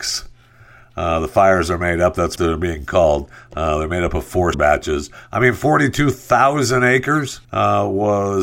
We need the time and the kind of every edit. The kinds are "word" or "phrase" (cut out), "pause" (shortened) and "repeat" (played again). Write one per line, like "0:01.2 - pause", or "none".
0:02.4 - word
0:04.5 - word
0:07.4 - pause